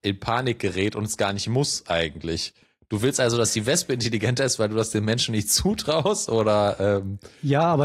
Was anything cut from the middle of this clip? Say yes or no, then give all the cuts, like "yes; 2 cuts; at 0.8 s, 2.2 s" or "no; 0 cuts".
no; 0 cuts